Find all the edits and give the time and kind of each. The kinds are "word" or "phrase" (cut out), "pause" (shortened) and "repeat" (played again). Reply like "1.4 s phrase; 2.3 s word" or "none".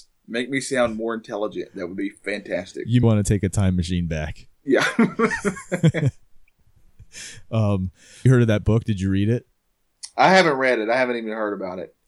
3.0 s word; 4.5 s pause; 8.3 s phrase